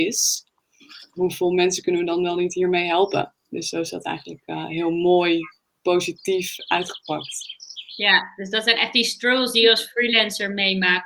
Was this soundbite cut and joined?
no; 0 cuts

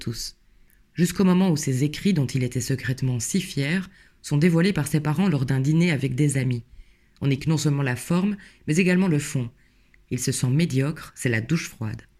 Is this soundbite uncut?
no; 1 cut; at 7.4 s

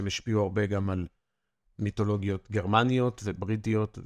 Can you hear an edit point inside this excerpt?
no; 0 cuts

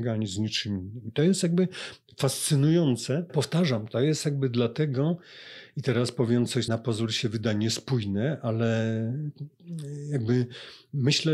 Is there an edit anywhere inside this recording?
yes; 2 cuts; at 3.3 s, 6.7 s

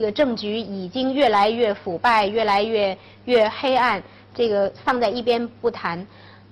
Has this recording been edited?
no; 0 cuts

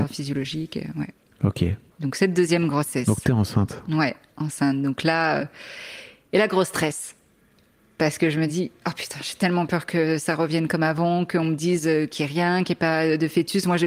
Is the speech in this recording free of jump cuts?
yes; 0 cuts

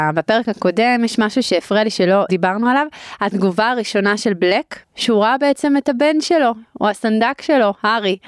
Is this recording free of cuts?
no; 1 cut; at 4.8 s

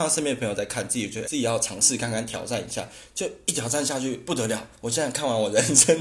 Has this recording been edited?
yes; 1 cut; at 1.2 s

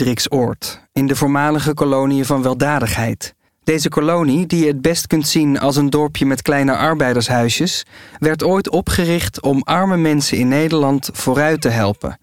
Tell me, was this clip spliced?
yes; 1 cut; at 3.5 s

